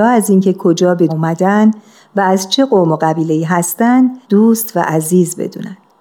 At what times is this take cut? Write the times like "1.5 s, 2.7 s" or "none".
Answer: 1.1 s, 4.2 s